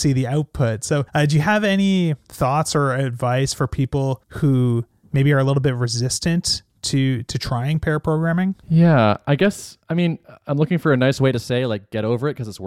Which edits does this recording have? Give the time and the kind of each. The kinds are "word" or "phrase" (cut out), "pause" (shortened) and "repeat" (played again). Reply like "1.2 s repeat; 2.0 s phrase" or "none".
1.1 s pause; 4.2 s pause; 8.6 s pause; 9.8 s pause

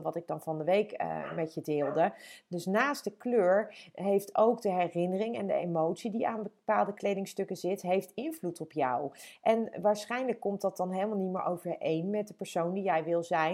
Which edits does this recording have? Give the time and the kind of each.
none

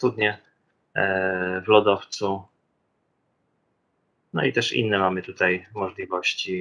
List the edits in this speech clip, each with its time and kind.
none

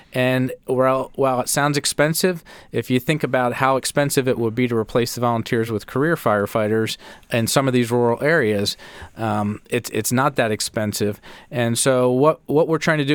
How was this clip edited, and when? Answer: none

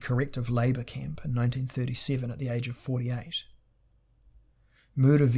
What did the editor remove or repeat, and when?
none

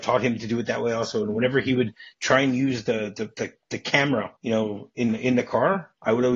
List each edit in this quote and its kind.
4.4 s pause

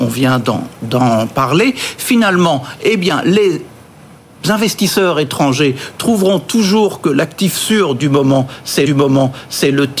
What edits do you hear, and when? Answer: 8.9 s repeat

